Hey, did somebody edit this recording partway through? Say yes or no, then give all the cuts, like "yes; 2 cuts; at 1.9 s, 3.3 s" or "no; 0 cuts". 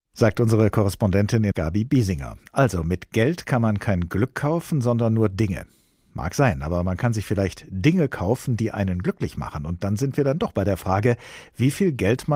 yes; 1 cut; at 1.5 s